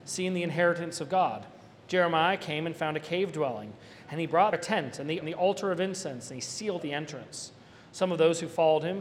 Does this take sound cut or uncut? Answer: cut